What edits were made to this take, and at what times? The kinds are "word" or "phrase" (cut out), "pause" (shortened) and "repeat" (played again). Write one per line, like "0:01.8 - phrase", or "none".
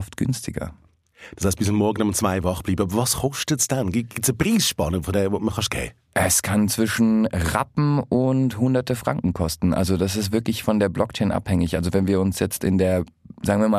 none